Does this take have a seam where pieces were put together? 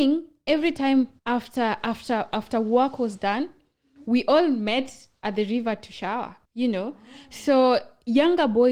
yes; 2 cuts; at 1.2 s, 6.4 s

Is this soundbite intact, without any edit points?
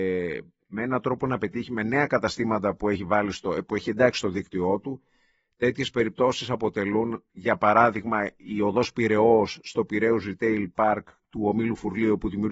yes; 0 cuts

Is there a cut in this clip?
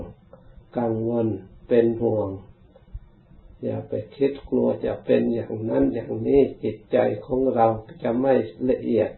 no; 0 cuts

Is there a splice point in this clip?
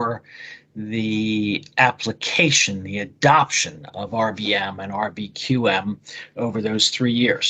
no; 0 cuts

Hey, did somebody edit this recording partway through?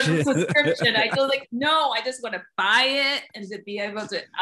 no; 0 cuts

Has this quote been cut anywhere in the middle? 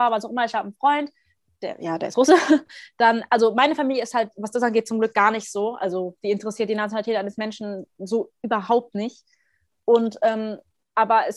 no; 0 cuts

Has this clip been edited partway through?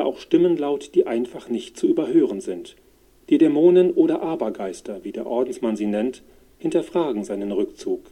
no; 0 cuts

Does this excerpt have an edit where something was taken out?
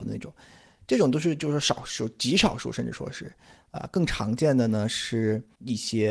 no; 0 cuts

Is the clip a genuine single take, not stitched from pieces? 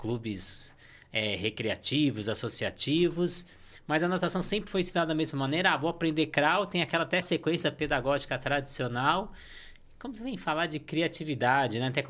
no; 1 cut; at 7.2 s

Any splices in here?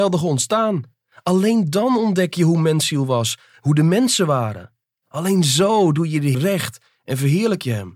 yes; 1 cut; at 6.3 s

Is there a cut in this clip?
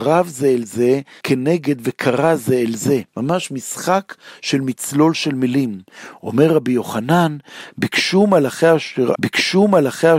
yes; 3 cuts; at 1.2 s, 3.1 s, 9.2 s

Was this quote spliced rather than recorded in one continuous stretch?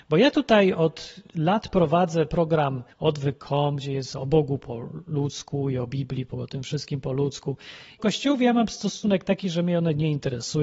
yes; 4 cuts; at 1.3 s, 2.9 s, 6.3 s, 8.0 s

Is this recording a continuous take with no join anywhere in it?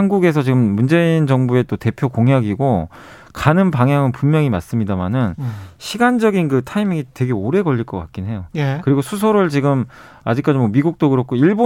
yes; 0 cuts

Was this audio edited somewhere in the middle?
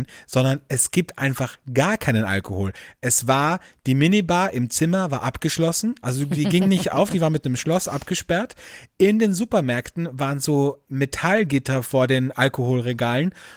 no; 0 cuts

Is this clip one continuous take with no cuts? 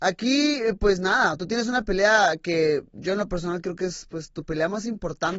yes; 0 cuts

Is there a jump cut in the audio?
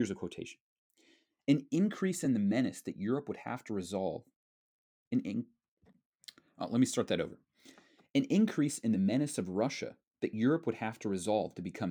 no; 0 cuts

